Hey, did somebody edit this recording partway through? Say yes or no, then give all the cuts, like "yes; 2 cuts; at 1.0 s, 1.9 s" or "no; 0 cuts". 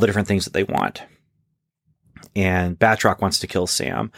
no; 0 cuts